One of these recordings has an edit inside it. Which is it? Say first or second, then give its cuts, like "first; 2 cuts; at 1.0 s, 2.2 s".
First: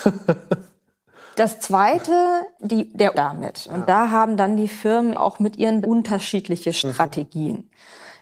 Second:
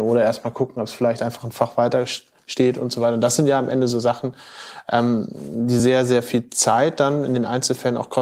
first; 4 cuts; at 2.6 s, 3.1 s, 5.1 s, 5.8 s